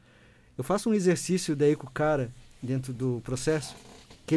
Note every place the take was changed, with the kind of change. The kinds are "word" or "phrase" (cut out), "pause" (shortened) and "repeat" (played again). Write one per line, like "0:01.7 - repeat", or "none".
none